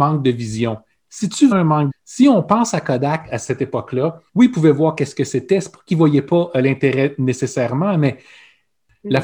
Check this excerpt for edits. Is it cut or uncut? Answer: cut